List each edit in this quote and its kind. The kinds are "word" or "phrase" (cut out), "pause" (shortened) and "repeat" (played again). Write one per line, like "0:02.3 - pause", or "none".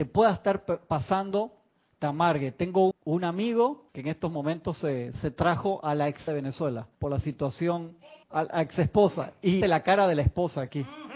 0:02.9 - word
0:03.9 - pause
0:05.1 - word
0:06.3 - word
0:06.9 - pause
0:08.2 - pause
0:09.6 - word